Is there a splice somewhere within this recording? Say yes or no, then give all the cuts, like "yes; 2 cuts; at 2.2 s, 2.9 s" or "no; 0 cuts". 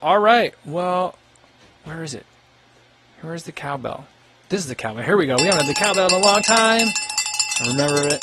no; 0 cuts